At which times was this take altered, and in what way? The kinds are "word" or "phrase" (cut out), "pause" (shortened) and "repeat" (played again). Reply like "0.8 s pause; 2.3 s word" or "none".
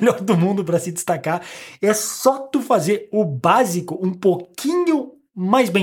none